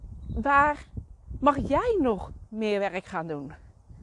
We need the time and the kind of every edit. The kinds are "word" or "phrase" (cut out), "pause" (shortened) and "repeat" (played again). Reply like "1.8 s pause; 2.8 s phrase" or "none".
none